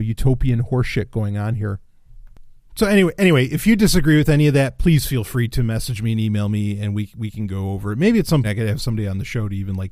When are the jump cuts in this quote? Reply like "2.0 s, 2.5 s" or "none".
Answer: 8.4 s